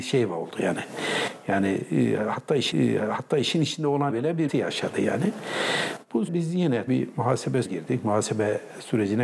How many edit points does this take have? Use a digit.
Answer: 6